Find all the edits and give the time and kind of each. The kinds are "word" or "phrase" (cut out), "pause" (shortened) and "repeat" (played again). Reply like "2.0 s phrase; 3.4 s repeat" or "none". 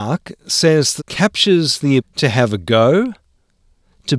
1.0 s word; 2.0 s word